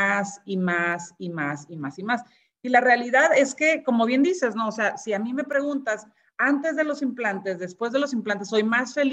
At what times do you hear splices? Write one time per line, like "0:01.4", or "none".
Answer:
none